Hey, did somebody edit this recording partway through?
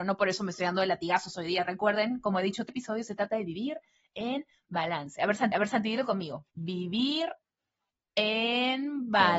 yes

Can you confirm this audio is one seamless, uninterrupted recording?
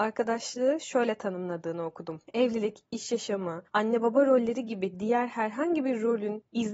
no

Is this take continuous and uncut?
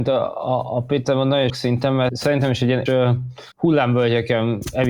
no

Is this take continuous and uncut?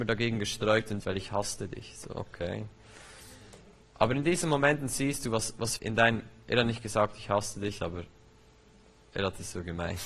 no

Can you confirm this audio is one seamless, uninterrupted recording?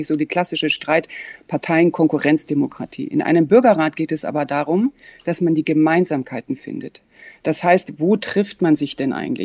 yes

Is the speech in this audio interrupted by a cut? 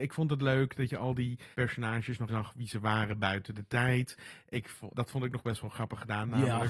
yes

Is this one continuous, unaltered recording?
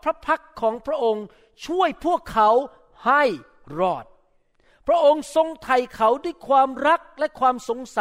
yes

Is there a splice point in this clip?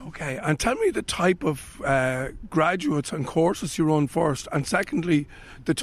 no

